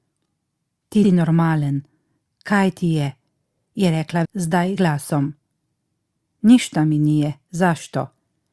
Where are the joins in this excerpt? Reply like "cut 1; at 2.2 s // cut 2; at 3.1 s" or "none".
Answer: cut 1; at 1.0 s // cut 2; at 4.2 s // cut 3; at 4.8 s